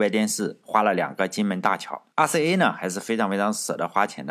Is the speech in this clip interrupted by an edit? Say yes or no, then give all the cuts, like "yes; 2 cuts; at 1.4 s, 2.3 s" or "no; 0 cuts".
yes; 1 cut; at 2.1 s